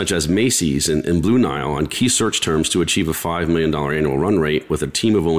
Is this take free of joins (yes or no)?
yes